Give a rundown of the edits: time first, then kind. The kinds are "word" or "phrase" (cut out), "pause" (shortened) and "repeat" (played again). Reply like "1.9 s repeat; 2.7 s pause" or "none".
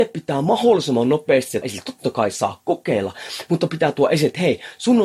1.6 s word